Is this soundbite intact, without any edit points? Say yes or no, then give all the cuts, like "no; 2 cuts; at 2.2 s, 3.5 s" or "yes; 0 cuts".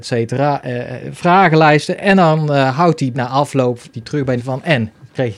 no; 3 cuts; at 3.1 s, 3.9 s, 4.4 s